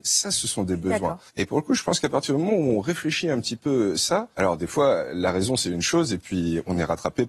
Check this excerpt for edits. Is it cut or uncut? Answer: cut